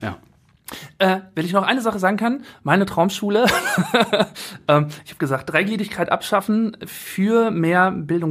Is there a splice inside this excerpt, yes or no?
no